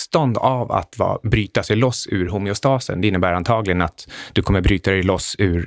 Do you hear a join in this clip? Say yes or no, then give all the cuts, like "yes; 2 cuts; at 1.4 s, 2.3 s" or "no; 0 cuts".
no; 0 cuts